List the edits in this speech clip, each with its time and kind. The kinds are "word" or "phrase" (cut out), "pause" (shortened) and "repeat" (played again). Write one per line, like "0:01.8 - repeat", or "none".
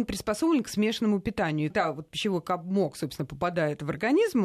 0:01.7 - word